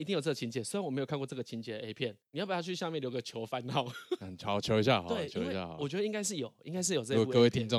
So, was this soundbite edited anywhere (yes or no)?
yes